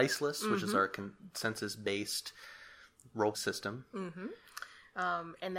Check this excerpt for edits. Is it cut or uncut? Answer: cut